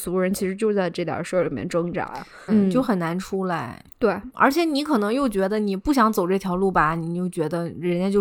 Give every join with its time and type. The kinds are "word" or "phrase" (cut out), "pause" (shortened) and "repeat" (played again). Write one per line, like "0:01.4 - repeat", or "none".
0:02.5 - phrase
0:04.3 - word